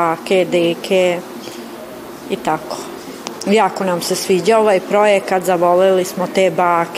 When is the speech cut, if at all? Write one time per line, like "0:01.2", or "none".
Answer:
none